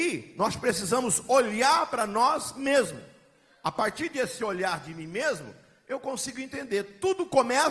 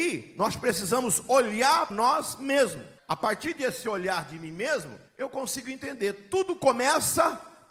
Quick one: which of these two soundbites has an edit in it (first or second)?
second